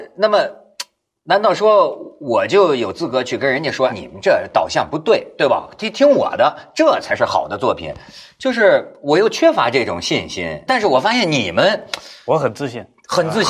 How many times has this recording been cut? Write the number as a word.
two